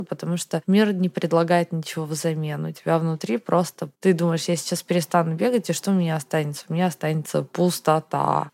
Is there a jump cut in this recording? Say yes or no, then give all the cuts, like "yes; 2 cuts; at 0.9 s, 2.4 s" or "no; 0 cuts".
yes; 1 cut; at 3.9 s